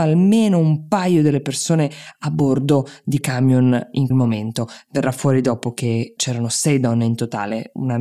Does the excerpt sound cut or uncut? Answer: cut